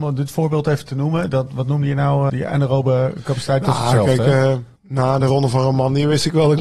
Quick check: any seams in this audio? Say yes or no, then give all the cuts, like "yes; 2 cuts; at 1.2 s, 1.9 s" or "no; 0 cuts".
yes; 3 cuts; at 1.5 s, 2.3 s, 4.8 s